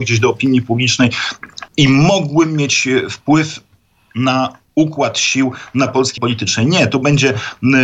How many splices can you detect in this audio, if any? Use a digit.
2